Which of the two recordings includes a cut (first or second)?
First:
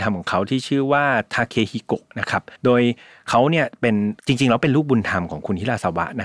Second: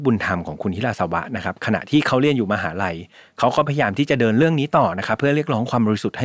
first